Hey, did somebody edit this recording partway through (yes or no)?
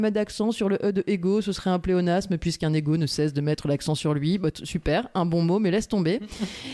no